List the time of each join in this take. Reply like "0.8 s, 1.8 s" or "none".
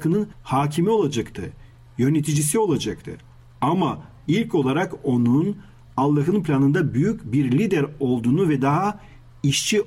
none